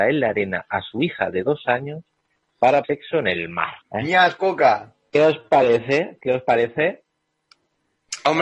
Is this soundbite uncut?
no; 2 cuts; at 2.8 s, 3.8 s

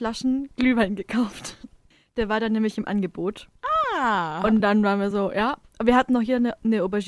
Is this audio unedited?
yes; 0 cuts

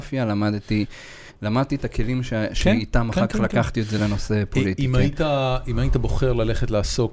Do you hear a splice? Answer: no; 0 cuts

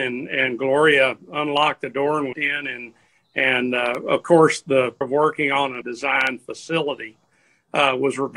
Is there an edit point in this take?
yes; 3 cuts; at 2.3 s, 5.0 s, 5.8 s

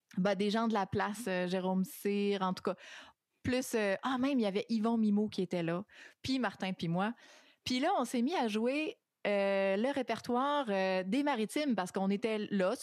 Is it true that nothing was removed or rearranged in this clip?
yes; 0 cuts

